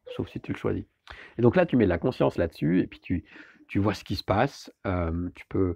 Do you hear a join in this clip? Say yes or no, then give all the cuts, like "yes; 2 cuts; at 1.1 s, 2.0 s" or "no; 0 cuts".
no; 0 cuts